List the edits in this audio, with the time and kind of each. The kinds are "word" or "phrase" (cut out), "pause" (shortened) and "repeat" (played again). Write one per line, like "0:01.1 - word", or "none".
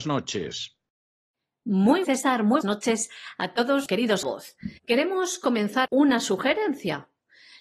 0:02.0 - phrase
0:02.6 - word
0:03.9 - word
0:04.2 - phrase
0:04.8 - pause
0:05.9 - word